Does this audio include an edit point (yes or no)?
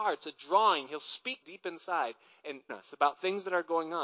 yes